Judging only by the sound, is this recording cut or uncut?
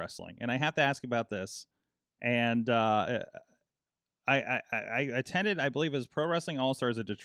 uncut